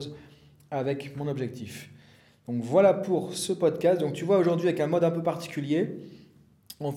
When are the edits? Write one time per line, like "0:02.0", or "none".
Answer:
none